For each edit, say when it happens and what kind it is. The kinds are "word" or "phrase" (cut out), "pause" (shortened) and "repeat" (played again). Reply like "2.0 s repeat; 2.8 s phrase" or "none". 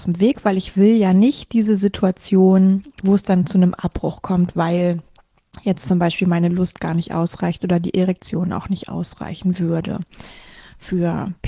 none